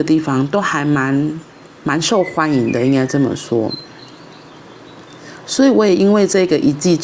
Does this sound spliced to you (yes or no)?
yes